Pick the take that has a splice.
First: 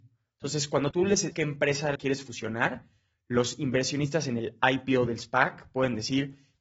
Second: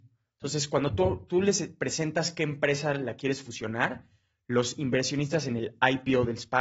first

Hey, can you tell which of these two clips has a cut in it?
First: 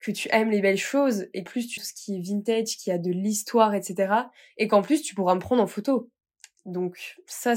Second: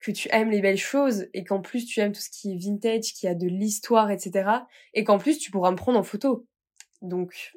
first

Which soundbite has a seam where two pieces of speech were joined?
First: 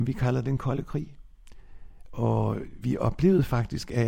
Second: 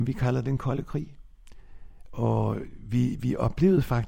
first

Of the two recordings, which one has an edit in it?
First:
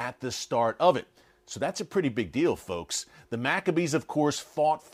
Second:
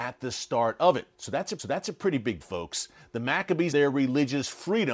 second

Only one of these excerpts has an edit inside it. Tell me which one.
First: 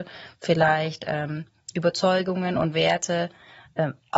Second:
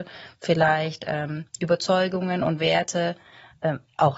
second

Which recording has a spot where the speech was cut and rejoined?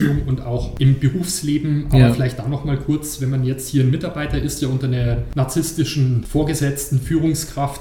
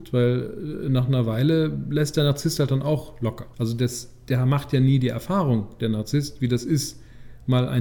second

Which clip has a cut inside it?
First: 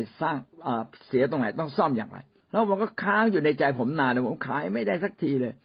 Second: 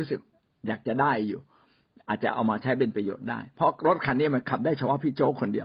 first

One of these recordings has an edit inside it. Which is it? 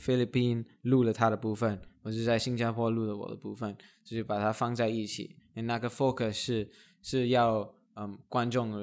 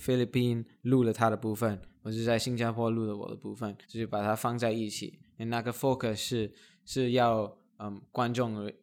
second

